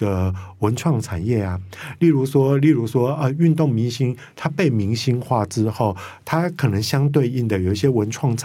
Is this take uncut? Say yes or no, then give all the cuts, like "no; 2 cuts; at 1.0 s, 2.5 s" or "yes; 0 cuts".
yes; 0 cuts